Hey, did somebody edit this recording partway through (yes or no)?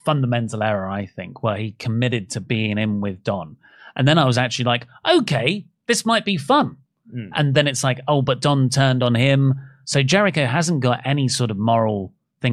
no